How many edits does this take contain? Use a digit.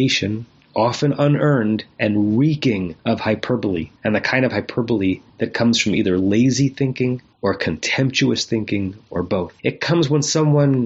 6